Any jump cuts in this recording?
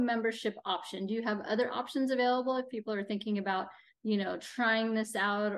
no; 0 cuts

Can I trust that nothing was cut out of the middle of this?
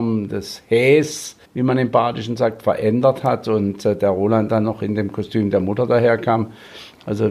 no; 1 cut; at 1.4 s

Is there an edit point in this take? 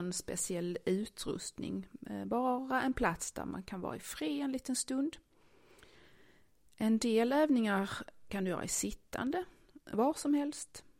no; 0 cuts

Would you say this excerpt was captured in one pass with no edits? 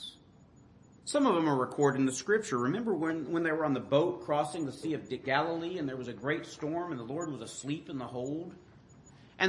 yes; 0 cuts

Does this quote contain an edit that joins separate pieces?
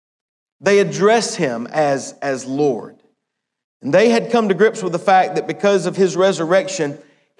no; 0 cuts

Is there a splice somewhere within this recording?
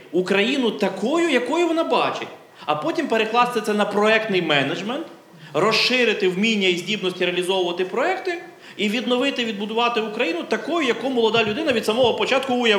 no; 0 cuts

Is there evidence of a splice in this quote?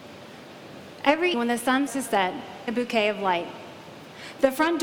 yes; 3 cuts; at 1.3 s, 1.9 s, 2.7 s

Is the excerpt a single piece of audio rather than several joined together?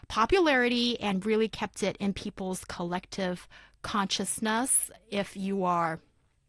yes; 0 cuts

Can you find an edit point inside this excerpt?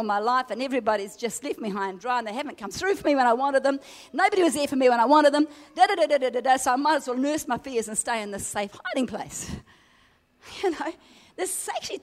no; 0 cuts

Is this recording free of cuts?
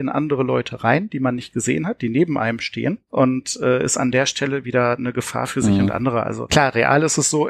yes; 0 cuts

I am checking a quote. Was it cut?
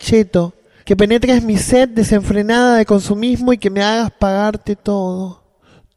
no; 0 cuts

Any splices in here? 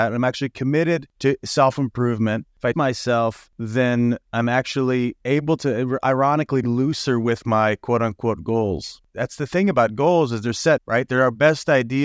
yes; 3 cuts; at 2.7 s, 6.6 s, 10.8 s

